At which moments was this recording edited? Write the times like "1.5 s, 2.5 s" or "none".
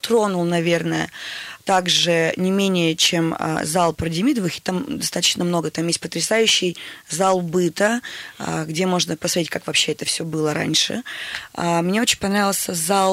none

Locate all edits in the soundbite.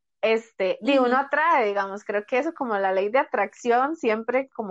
none

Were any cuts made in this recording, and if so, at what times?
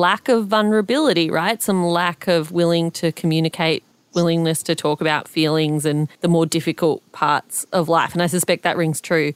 3.9 s, 6.1 s

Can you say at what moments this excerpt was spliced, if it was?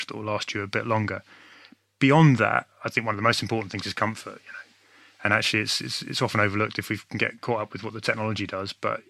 none

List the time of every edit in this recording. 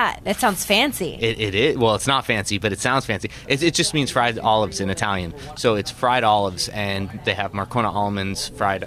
none

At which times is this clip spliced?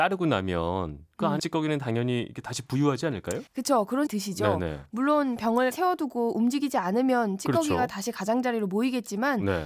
1.4 s, 3.5 s, 4.1 s, 5.7 s

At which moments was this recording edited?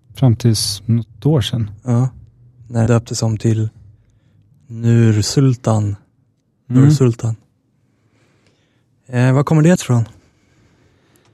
2.9 s, 9.8 s

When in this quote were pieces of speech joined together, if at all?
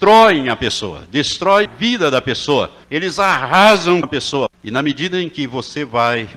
1.7 s, 2.8 s, 4.0 s, 4.5 s

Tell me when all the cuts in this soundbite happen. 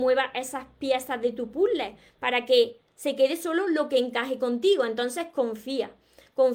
none

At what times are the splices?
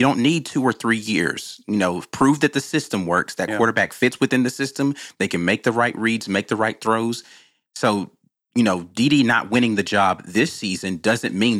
none

